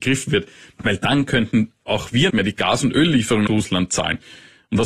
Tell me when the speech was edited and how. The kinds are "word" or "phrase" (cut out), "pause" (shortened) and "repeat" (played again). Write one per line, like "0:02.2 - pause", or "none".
0:02.3 - word
0:03.5 - word